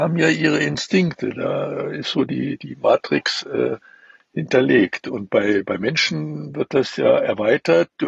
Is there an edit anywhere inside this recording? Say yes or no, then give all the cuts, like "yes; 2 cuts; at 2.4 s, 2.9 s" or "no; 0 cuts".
no; 0 cuts